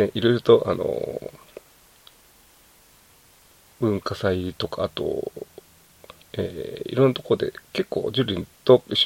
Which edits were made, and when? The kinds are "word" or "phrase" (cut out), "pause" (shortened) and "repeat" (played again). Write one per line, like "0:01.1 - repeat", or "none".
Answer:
0:06.2 - pause